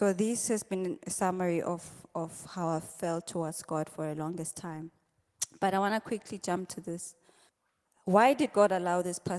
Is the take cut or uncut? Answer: uncut